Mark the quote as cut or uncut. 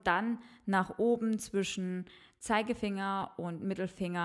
uncut